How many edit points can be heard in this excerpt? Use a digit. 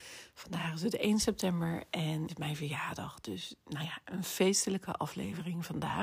1